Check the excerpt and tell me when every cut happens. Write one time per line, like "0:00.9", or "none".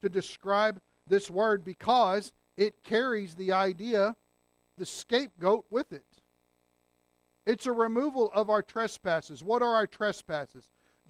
0:04.8